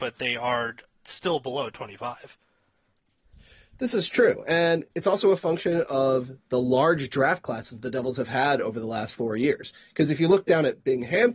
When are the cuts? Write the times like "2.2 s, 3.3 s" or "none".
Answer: 4.9 s

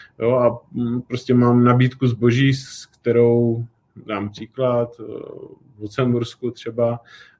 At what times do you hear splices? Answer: none

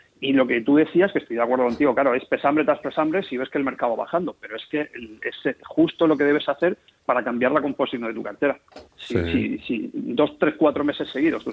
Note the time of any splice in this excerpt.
8.9 s

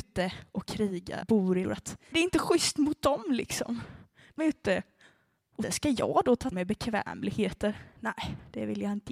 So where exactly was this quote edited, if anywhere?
1.2 s, 1.6 s, 2.1 s, 4.4 s, 5.6 s, 6.5 s

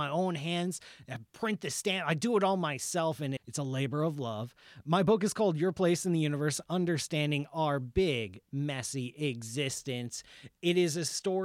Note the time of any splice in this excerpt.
3.4 s

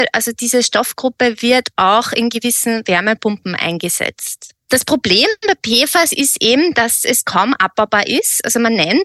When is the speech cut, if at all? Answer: none

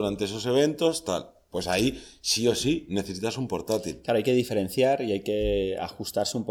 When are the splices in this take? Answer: none

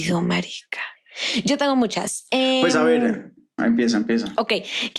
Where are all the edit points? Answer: 3.6 s

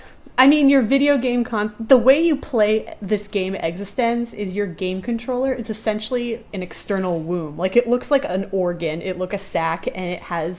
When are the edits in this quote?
6.5 s, 9.3 s

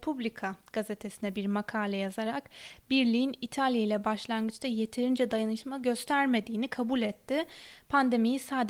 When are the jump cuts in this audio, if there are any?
none

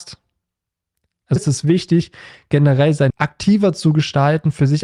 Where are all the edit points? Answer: 1.4 s, 3.1 s

